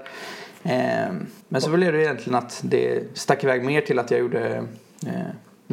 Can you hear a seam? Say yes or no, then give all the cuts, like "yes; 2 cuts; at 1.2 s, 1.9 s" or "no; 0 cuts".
yes; 1 cut; at 1.4 s